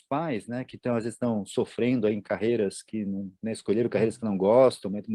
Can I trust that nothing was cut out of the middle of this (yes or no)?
yes